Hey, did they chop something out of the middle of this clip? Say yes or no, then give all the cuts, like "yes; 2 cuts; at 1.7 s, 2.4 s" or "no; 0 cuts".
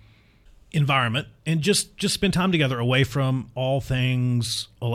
no; 0 cuts